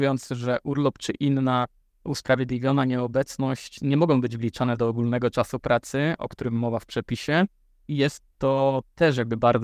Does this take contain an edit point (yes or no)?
no